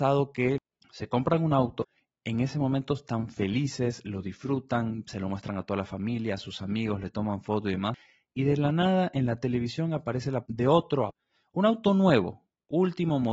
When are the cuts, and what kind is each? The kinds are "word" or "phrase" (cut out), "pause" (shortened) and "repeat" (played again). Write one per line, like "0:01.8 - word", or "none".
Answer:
0:10.5 - word